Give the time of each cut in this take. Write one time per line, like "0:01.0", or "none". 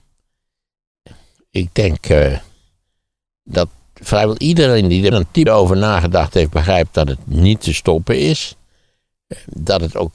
0:05.1
0:05.5

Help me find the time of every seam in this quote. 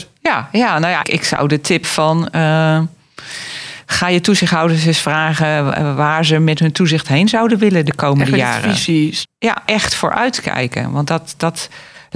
0:01.0
0:01.8
0:09.3
0:09.7

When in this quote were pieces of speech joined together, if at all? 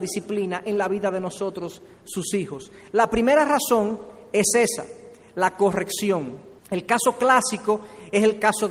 0:06.6

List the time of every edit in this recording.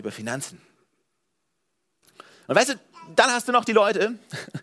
none

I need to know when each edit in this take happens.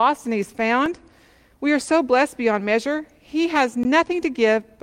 none

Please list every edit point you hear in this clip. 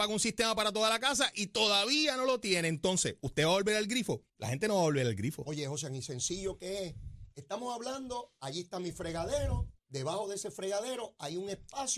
0:04.3
0:09.8

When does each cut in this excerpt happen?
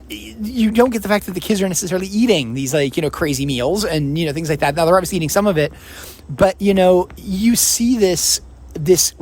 none

